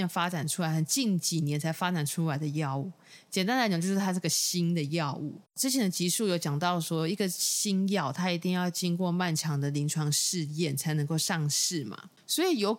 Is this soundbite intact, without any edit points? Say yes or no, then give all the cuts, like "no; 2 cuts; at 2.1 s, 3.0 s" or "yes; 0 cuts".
no; 1 cut; at 5.4 s